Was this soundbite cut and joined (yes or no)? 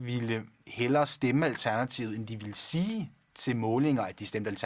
no